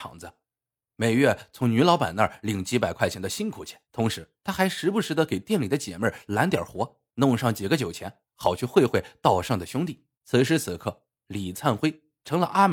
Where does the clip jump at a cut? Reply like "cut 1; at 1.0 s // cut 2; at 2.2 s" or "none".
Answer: cut 1; at 3.8 s // cut 2; at 4.4 s // cut 3; at 7.1 s // cut 4; at 10.1 s // cut 5; at 11.2 s